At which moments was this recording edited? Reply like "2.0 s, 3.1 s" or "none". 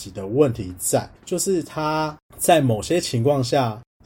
1.2 s